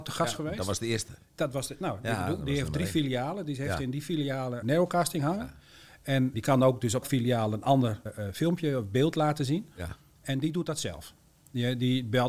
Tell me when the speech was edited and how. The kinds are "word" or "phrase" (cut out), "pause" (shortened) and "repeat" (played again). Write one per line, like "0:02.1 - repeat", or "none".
0:04.6 - word
0:06.3 - word
0:07.0 - word
0:08.1 - word